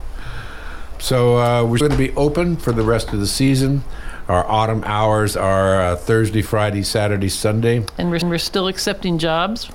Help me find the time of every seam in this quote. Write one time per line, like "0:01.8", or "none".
0:01.8
0:08.2